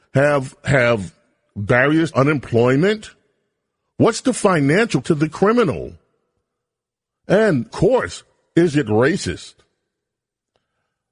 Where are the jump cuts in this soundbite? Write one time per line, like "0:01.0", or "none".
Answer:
0:02.1
0:05.0
0:07.7

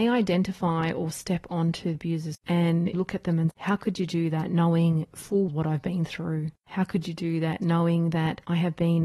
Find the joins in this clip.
0:01.9
0:02.3
0:02.9
0:03.5
0:05.5

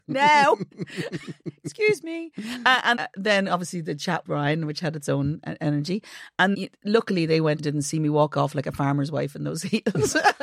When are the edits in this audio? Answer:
0:03.0
0:04.2
0:06.5
0:07.6

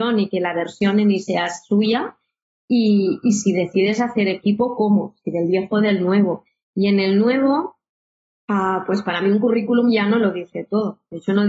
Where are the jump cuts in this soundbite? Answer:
none

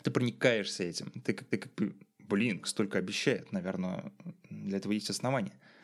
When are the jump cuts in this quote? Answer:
0:01.5
0:02.6

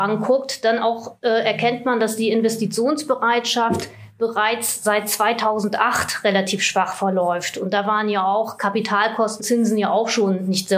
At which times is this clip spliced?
0:09.4

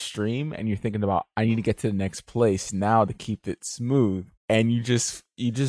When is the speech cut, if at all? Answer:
0:04.4

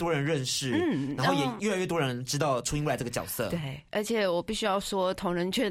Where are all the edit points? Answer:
none

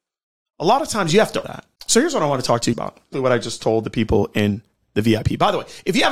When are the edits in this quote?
0:01.4
0:01.8
0:02.7
0:03.1

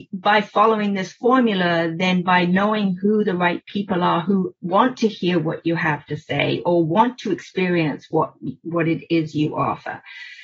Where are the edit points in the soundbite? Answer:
none

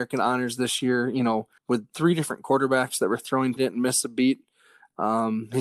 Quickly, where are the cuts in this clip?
0:01.6
0:03.6

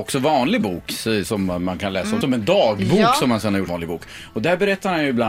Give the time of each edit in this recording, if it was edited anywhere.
0:01.2
0:02.2
0:03.7

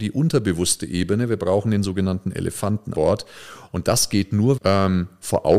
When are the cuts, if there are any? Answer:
0:02.9
0:04.6

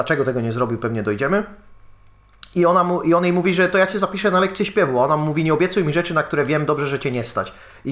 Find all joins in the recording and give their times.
none

